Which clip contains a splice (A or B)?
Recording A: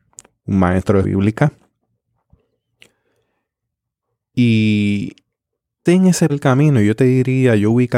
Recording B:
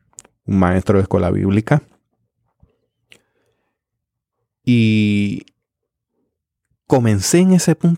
A